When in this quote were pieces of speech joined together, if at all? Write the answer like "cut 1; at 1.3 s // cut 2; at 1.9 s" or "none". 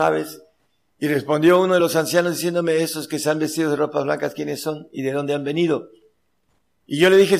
none